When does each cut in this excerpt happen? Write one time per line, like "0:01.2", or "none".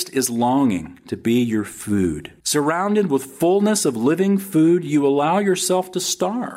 0:02.4